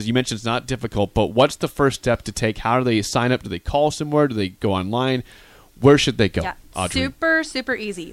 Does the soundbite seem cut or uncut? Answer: uncut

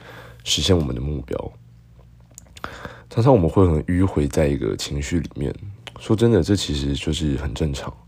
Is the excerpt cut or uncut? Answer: cut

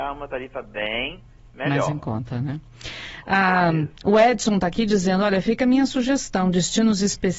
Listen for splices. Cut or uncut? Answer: uncut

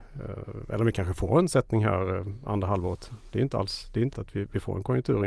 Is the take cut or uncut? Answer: cut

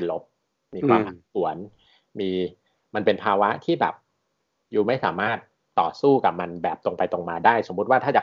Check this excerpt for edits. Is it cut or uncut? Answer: uncut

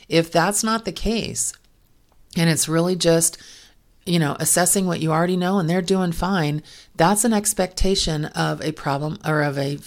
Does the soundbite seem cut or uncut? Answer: uncut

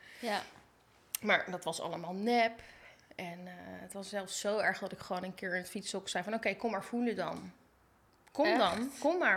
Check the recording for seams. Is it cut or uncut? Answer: uncut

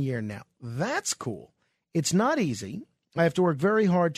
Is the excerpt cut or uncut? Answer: uncut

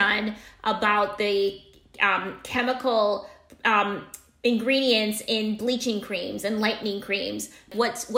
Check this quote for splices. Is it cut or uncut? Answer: uncut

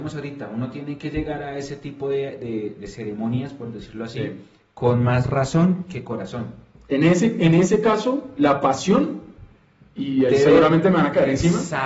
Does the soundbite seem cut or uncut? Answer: uncut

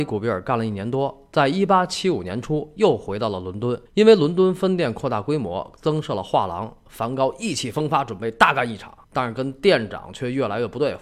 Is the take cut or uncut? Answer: cut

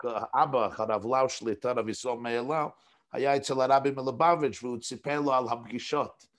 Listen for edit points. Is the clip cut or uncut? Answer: uncut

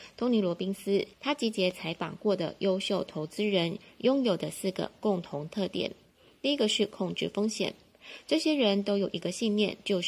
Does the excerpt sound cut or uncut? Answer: cut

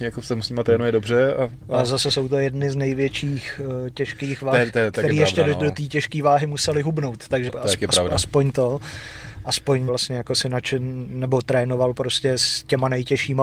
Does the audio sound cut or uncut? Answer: cut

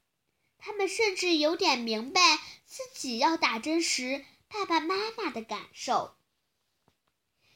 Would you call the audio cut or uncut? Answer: uncut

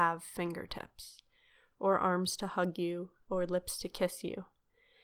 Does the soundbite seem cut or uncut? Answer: uncut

